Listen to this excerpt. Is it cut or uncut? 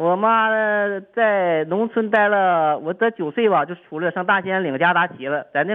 uncut